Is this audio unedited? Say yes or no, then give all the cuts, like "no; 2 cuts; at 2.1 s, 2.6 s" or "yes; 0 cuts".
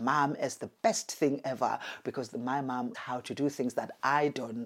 no; 1 cut; at 2.9 s